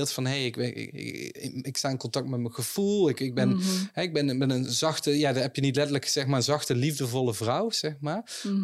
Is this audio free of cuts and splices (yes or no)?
yes